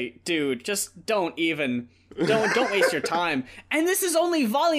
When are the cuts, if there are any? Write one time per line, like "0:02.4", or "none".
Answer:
none